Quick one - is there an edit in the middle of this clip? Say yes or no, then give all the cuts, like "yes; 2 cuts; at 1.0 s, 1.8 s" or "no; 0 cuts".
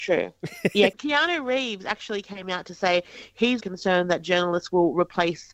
yes; 2 cuts; at 0.9 s, 3.6 s